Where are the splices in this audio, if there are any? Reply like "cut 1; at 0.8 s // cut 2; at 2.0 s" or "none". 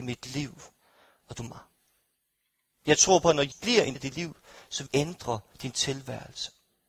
cut 1; at 1.5 s // cut 2; at 3.5 s // cut 3; at 4.0 s // cut 4; at 4.9 s